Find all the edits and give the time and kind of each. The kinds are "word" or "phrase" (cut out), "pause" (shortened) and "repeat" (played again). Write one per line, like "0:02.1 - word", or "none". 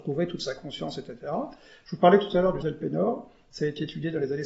0:02.6 - word